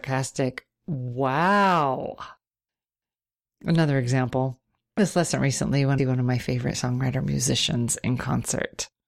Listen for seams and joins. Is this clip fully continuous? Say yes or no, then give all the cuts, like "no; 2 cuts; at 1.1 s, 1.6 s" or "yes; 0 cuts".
no; 3 cuts; at 5.0 s, 6.0 s, 6.7 s